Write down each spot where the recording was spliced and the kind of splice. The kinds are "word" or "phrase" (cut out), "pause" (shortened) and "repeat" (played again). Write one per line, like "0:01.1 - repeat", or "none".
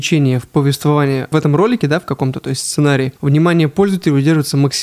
none